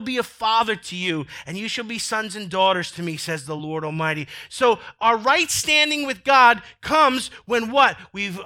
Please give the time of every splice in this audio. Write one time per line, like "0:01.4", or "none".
none